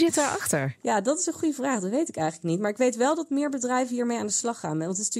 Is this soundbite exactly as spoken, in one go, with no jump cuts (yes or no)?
yes